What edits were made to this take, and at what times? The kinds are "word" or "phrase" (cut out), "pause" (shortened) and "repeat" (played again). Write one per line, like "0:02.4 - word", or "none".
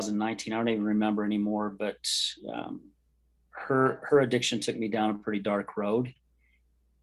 none